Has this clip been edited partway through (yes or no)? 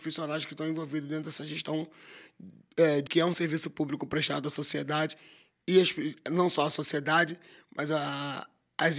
yes